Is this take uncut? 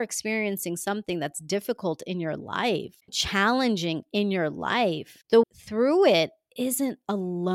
no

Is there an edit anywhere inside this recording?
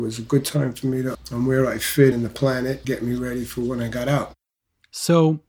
yes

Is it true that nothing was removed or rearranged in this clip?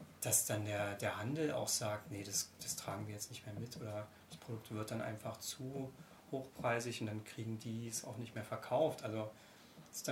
yes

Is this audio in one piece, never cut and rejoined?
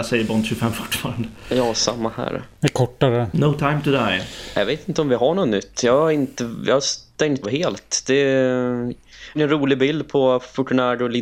no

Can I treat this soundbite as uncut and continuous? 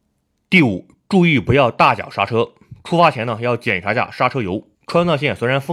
no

